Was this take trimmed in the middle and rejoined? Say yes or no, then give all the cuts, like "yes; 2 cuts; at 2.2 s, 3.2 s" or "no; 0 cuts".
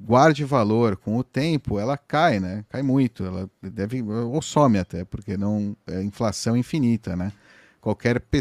no; 0 cuts